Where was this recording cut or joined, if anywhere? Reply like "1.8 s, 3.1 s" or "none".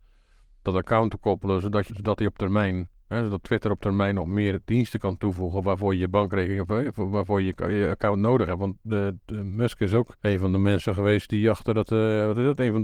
1.9 s, 10.2 s